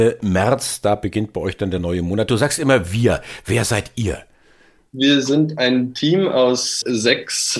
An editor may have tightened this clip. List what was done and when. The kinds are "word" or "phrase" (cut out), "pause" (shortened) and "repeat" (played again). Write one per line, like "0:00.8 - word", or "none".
none